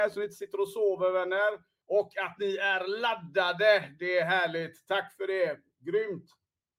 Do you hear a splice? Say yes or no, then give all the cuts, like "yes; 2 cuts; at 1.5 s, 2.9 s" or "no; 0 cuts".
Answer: yes; 1 cut; at 1.8 s